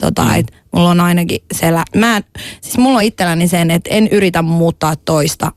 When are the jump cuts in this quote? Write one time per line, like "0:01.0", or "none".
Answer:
none